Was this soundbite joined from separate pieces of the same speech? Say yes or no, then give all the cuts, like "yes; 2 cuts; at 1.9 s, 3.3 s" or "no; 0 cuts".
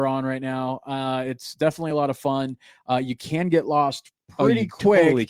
no; 0 cuts